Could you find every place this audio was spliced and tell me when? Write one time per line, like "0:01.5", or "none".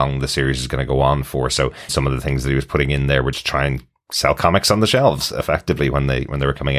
0:01.9
0:03.3